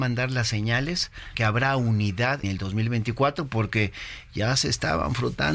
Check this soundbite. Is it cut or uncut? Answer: cut